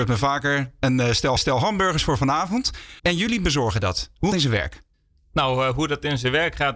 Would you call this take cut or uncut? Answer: cut